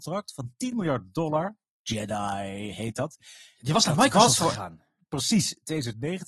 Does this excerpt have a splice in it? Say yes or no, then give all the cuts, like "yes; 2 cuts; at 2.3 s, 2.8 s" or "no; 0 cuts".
no; 0 cuts